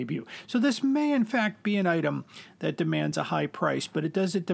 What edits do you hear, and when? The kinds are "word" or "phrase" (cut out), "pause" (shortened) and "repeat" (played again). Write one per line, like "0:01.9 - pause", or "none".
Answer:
none

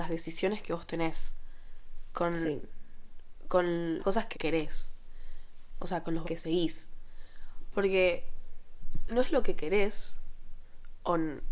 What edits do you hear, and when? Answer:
0:04.0 - word
0:04.3 - word
0:06.2 - word
0:09.1 - word

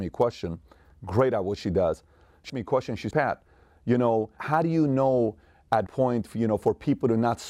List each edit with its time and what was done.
0:02.5 - word
0:03.1 - word
0:04.4 - word
0:05.9 - word

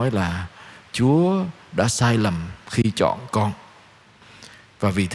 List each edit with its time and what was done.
none

